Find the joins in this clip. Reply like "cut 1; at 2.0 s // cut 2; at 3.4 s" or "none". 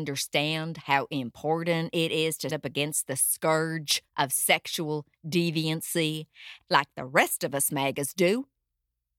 cut 1; at 2.5 s // cut 2; at 4.1 s // cut 3; at 6.6 s